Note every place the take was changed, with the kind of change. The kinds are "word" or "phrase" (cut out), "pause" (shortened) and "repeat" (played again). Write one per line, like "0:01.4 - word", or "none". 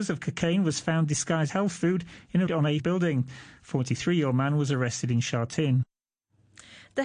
0:01.5 - word
0:02.5 - word
0:02.8 - phrase

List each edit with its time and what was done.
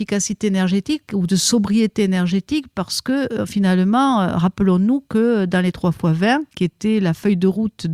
0:06.5 - pause

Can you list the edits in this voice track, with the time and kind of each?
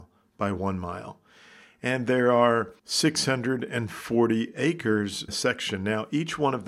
0:02.8 - pause
0:05.3 - word

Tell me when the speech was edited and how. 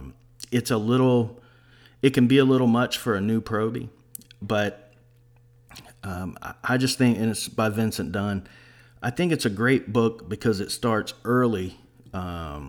none

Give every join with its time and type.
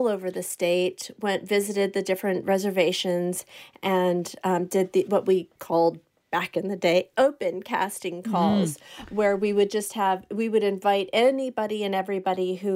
none

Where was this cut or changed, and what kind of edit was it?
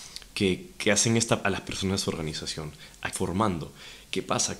0:01.4 - word
0:03.1 - phrase

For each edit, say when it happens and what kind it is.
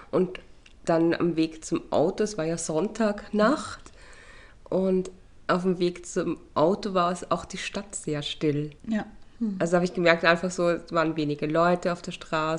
0:08.8 - pause

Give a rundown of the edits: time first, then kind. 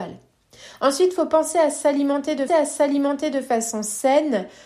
0:02.5 - repeat

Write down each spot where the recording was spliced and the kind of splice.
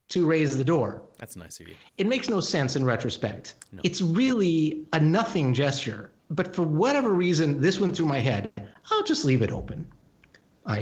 0:06.2 - pause

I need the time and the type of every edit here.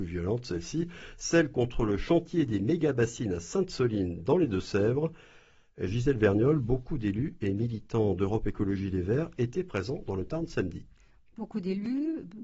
none

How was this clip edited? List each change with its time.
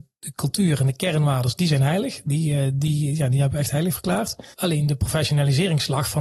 0:04.5 - pause

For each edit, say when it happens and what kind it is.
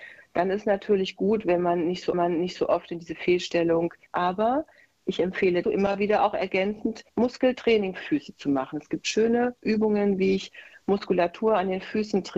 0:02.1 - repeat
0:04.1 - word
0:05.6 - word
0:07.1 - pause
0:08.0 - word

